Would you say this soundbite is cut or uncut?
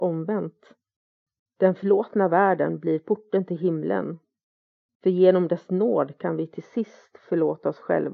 uncut